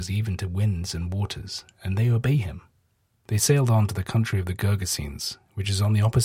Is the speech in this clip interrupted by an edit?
no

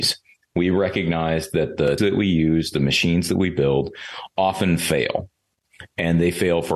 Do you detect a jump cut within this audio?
yes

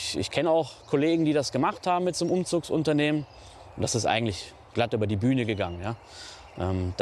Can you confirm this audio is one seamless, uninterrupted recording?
yes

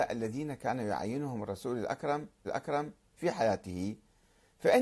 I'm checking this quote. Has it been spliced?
yes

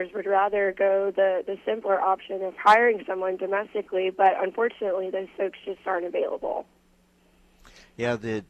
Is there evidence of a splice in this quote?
no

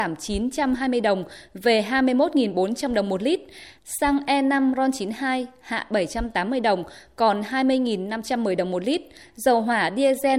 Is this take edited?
yes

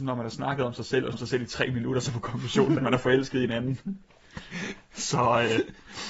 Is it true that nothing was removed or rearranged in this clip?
no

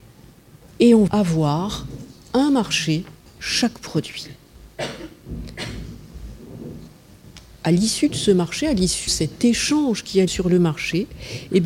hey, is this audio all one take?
no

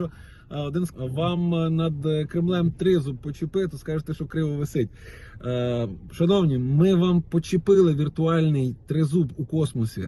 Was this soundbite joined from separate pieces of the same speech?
yes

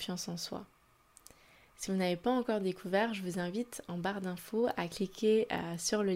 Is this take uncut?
yes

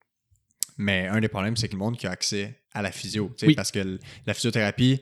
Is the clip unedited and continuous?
no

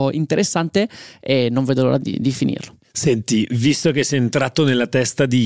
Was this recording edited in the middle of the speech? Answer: yes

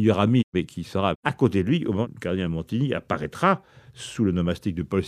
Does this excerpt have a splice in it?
no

